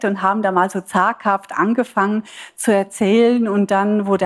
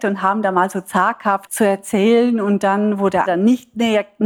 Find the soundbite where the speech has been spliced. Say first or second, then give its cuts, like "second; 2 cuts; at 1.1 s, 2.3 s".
second; 2 cuts; at 1.5 s, 3.3 s